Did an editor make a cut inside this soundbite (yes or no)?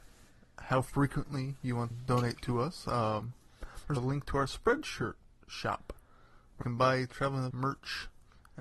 yes